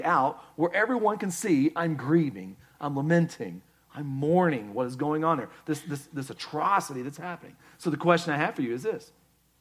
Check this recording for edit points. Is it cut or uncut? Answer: uncut